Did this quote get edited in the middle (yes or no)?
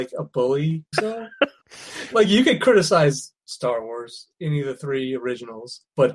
yes